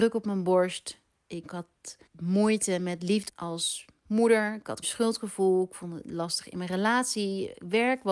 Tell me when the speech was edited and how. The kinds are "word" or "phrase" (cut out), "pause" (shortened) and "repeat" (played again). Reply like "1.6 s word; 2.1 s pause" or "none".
1.4 s word; 2.1 s pause; 3.3 s word; 4.8 s word